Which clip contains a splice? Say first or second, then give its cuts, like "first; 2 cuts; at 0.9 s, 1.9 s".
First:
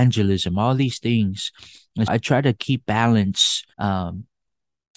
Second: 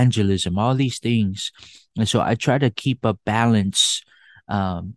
first; 3 cuts; at 2.1 s, 2.8 s, 3.7 s